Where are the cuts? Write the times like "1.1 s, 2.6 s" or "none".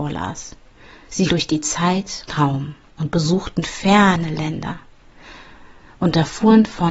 1.3 s, 2.3 s

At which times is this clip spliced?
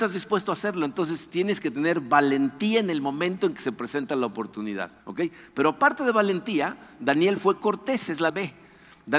5.0 s, 8.3 s

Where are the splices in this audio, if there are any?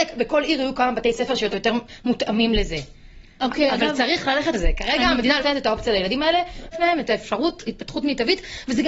1.5 s, 4.5 s, 5.4 s, 6.7 s, 7.6 s

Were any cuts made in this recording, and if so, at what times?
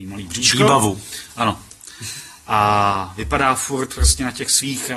none

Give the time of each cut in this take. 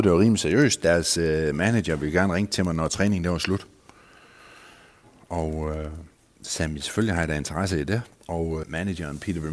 8.6 s

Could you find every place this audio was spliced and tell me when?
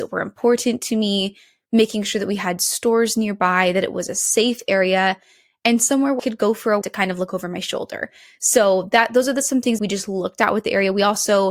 6.2 s, 6.8 s, 9.8 s

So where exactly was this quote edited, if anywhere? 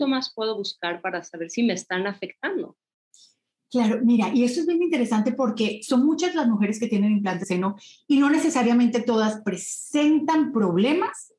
7.4 s

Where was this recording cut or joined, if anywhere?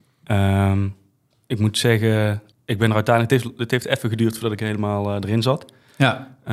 2.5 s

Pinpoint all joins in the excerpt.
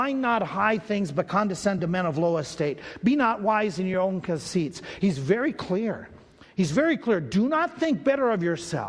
none

